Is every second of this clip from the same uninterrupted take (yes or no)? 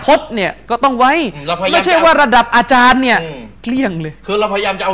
no